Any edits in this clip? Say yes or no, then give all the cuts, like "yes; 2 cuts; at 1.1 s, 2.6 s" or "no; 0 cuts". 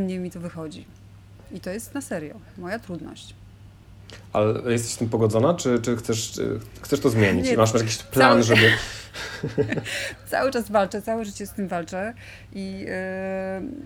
no; 0 cuts